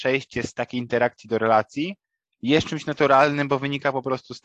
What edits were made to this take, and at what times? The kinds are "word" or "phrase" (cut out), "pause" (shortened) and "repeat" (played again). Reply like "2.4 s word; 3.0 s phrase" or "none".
none